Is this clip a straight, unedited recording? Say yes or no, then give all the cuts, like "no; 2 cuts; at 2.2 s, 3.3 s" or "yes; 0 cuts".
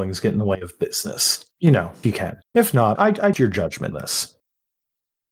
no; 6 cuts; at 1.5 s, 2.0 s, 2.4 s, 3.0 s, 3.3 s, 3.9 s